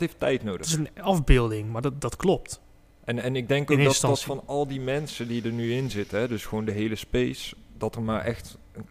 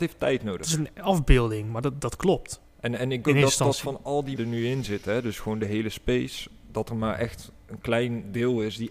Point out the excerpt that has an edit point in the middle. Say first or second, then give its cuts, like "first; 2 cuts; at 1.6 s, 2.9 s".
second; 3 cuts; at 2.7 s, 3.2 s, 4.4 s